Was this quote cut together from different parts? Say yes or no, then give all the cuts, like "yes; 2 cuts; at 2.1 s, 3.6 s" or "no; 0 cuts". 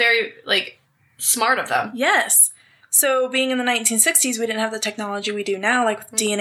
no; 0 cuts